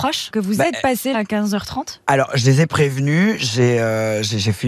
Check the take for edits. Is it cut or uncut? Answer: cut